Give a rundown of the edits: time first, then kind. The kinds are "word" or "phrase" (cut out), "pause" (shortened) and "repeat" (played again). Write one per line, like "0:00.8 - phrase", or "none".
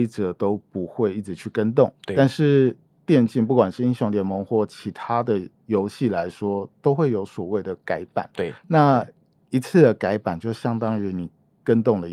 0:05.5 - pause
0:08.6 - pause